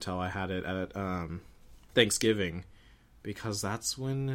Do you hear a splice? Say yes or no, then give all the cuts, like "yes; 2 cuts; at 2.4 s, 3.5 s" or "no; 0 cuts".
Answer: no; 0 cuts